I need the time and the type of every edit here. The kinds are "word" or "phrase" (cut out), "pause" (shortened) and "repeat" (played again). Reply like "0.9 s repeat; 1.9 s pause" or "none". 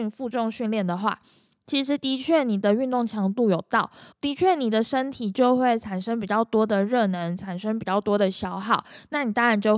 4.1 s pause